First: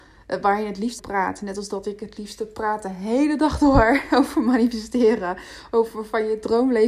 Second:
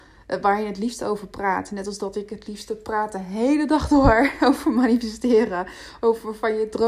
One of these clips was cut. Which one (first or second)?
first